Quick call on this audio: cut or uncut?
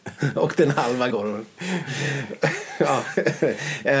cut